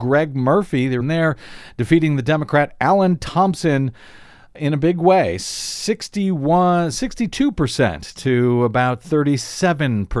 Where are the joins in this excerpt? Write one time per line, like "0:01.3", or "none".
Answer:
0:01.0